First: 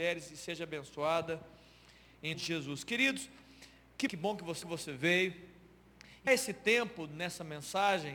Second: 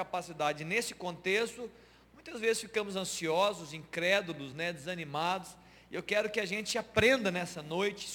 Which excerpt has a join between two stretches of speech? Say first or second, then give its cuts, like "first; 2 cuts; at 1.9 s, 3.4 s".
first; 4 cuts; at 2.3 s, 4.1 s, 4.6 s, 6.3 s